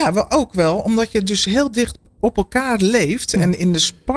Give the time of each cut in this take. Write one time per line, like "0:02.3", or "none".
none

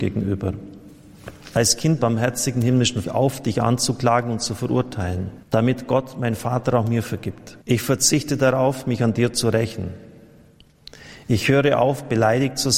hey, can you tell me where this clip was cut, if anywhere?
0:02.0
0:03.0
0:05.4
0:07.6

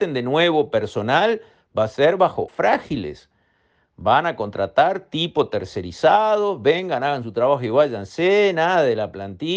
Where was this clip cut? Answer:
0:02.5

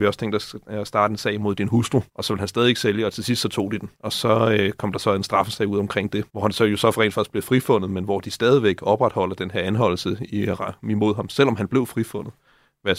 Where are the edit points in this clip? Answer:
0:02.1
0:03.9
0:06.3

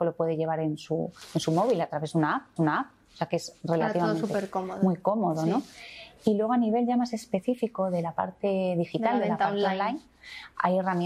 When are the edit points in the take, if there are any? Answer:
0:02.6

